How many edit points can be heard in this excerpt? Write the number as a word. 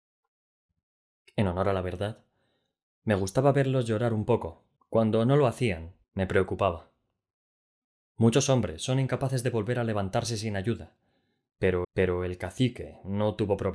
three